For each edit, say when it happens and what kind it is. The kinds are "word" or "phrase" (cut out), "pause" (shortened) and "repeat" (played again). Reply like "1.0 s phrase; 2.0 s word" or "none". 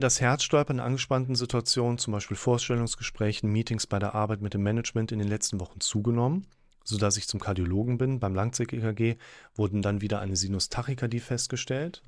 none